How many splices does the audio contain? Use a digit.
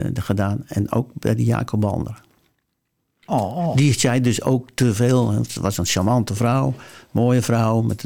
0